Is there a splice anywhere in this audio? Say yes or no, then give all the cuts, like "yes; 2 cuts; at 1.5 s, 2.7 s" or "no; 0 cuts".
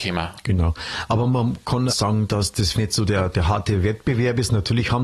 yes; 2 cuts; at 1.9 s, 2.7 s